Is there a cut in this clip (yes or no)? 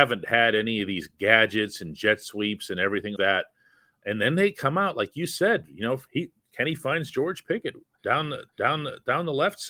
yes